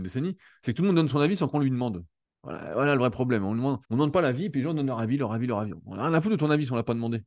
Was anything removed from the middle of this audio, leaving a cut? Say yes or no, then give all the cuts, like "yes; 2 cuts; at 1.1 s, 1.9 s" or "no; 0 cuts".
yes; 2 cuts; at 2.2 s, 3.8 s